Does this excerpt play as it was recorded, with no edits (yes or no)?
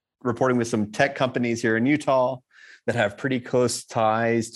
yes